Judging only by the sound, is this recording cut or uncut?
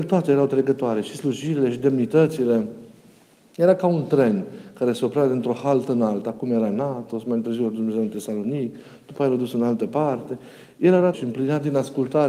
cut